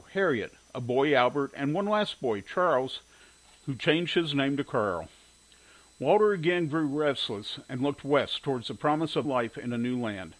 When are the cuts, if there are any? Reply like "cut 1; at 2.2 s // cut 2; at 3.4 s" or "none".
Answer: cut 1; at 9.2 s